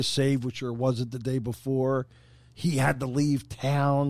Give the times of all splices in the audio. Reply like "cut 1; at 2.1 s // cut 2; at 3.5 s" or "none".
none

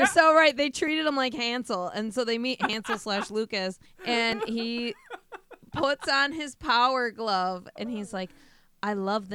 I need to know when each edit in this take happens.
cut 1; at 3.8 s

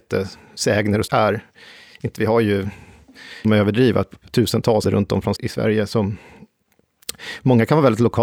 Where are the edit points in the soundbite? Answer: cut 1; at 1.1 s // cut 2; at 2.2 s // cut 3; at 3.4 s // cut 4; at 4.8 s // cut 5; at 5.4 s

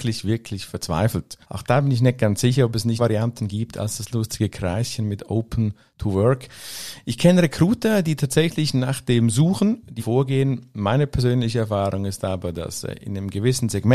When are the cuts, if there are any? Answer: cut 1; at 1.4 s // cut 2; at 3.0 s // cut 3; at 10.0 s

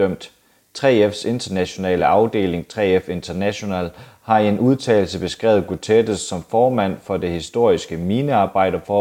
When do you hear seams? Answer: none

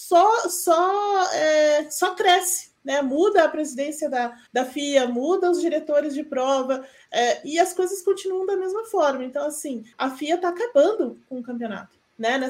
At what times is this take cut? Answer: cut 1; at 4.5 s // cut 2; at 9.9 s

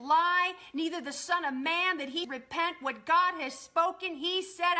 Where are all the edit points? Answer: cut 1; at 2.2 s

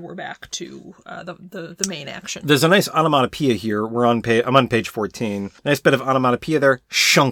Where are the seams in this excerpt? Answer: cut 1; at 5.6 s

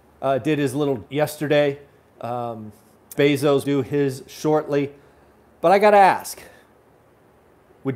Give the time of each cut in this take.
cut 1; at 1.1 s // cut 2; at 3.2 s // cut 3; at 3.6 s

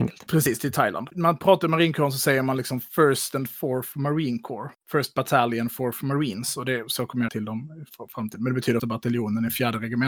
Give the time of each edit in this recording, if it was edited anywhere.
cut 1; at 1.1 s // cut 2; at 7.3 s // cut 3; at 8.8 s

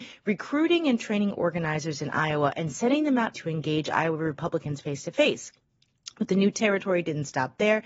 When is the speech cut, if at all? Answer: cut 1; at 3.3 s

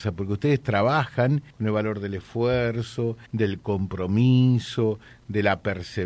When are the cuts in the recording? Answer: cut 1; at 1.5 s // cut 2; at 3.3 s

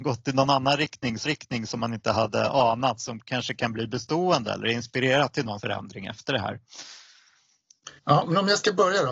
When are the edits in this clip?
cut 1; at 1.2 s // cut 2; at 5.6 s // cut 3; at 8.0 s

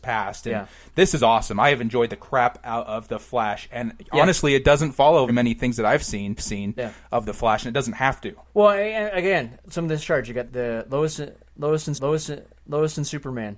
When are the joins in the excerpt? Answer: cut 1; at 5.3 s // cut 2; at 6.4 s // cut 3; at 8.4 s // cut 4; at 9.6 s // cut 5; at 10.4 s // cut 6; at 11.9 s

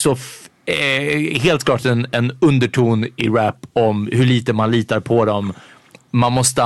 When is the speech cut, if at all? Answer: none

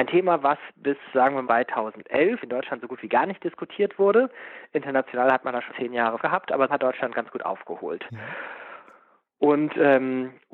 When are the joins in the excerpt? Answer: cut 1; at 1.4 s // cut 2; at 2.4 s // cut 3; at 5.7 s // cut 4; at 6.2 s // cut 5; at 6.7 s

